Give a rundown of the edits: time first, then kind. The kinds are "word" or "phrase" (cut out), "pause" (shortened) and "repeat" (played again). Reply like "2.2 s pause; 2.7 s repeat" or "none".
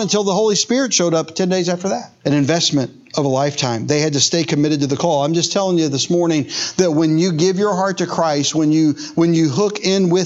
2.2 s pause